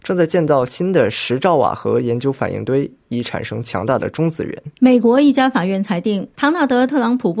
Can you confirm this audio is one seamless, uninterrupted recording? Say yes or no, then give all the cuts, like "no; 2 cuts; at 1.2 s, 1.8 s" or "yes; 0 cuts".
no; 2 cuts; at 4.7 s, 6.3 s